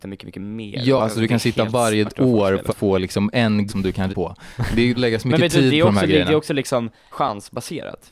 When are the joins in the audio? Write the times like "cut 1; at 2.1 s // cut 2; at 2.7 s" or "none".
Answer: cut 1; at 1.0 s // cut 2; at 2.0 s // cut 3; at 2.7 s // cut 4; at 3.7 s // cut 5; at 4.1 s // cut 6; at 5.0 s // cut 7; at 7.1 s